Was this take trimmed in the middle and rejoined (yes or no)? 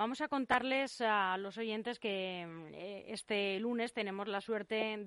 no